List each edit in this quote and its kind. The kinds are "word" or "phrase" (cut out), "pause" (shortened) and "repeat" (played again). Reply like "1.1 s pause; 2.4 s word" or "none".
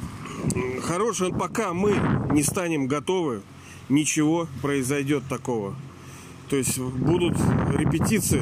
1.3 s phrase; 4.6 s word